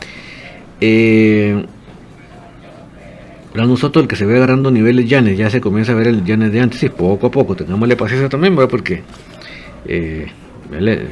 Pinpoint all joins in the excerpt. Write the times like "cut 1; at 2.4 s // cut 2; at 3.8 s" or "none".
none